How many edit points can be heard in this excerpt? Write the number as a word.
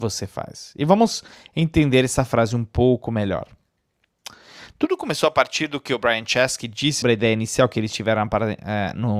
one